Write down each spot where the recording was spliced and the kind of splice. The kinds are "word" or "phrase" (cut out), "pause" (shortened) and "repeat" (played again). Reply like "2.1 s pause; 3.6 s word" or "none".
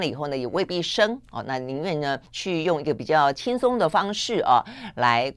2.3 s pause